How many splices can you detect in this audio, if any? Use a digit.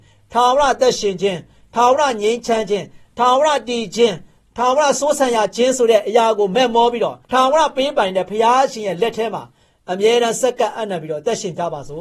1